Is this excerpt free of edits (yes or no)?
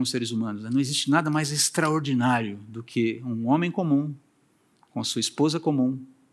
yes